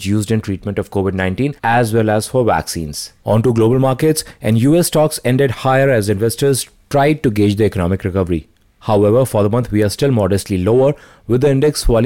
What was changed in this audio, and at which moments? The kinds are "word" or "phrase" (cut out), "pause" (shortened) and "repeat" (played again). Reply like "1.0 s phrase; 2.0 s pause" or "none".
1.6 s pause; 3.2 s pause; 8.6 s pause